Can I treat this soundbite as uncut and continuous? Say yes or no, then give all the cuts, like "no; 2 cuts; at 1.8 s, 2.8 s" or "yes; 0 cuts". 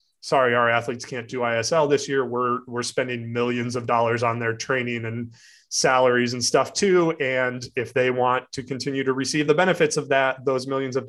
yes; 0 cuts